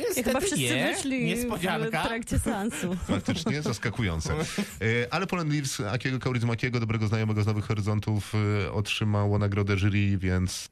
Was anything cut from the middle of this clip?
no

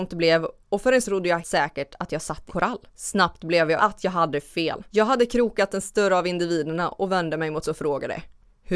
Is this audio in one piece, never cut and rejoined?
no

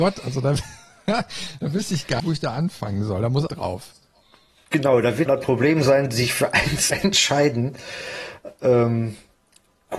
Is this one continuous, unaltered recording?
no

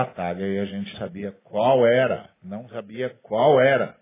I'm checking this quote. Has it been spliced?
yes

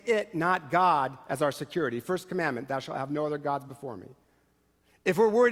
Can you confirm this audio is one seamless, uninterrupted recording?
yes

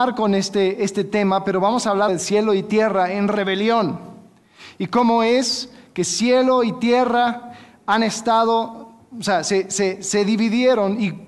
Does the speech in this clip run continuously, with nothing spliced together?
no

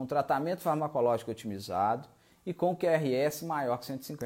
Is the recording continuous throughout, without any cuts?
yes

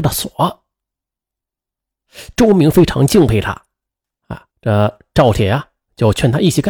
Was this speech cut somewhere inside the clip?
yes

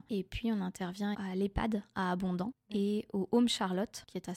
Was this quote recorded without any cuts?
no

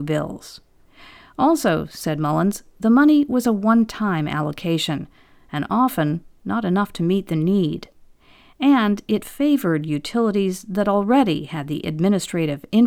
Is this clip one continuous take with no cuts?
yes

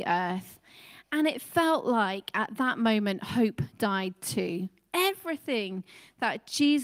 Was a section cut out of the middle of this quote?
yes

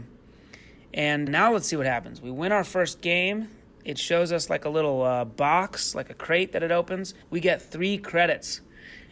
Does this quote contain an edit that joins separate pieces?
yes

